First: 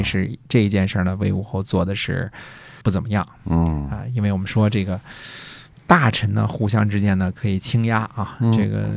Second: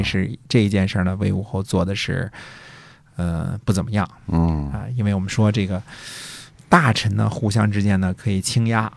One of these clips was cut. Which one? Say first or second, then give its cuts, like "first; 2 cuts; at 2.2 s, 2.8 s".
first; 1 cut; at 2.8 s